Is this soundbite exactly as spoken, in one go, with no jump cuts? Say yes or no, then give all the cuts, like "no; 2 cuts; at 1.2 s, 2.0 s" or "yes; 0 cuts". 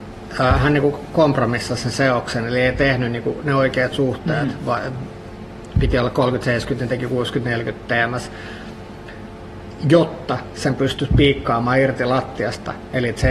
yes; 0 cuts